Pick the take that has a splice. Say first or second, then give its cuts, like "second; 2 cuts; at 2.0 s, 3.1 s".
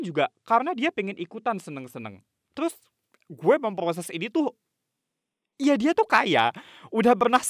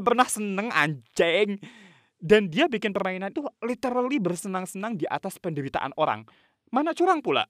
second; 1 cut; at 3.3 s